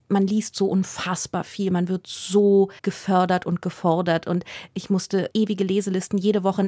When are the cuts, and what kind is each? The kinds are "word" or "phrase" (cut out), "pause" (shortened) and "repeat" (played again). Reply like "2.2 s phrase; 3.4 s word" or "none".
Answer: 2.8 s pause; 5.3 s word